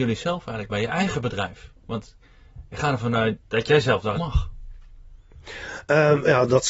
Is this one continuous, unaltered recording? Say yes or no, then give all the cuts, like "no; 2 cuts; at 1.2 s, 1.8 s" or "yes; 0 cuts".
no; 1 cut; at 4.2 s